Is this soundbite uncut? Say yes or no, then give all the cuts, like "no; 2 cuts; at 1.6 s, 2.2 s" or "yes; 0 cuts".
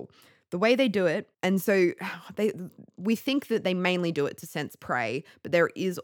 no; 1 cut; at 1.3 s